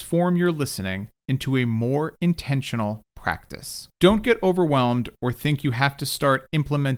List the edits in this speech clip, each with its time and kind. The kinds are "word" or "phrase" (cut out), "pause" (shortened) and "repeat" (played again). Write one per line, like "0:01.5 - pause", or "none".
0:01.2 - pause
0:03.9 - pause